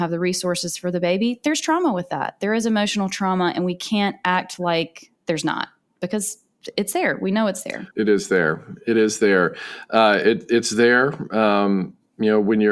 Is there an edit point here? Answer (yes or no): yes